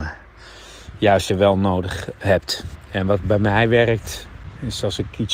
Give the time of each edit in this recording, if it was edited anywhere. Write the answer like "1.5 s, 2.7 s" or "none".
1.3 s